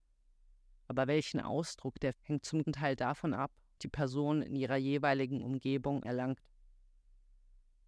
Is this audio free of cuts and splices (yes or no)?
no